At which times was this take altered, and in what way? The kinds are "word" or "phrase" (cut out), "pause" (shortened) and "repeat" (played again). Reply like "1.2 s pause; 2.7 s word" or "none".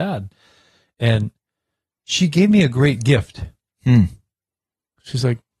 none